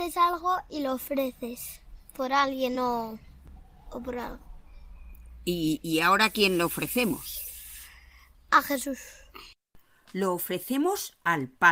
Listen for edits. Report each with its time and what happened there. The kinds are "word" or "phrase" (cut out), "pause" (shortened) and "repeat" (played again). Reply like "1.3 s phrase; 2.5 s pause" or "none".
none